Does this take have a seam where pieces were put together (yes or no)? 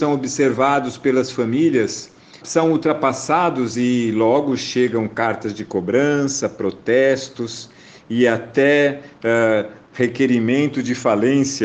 yes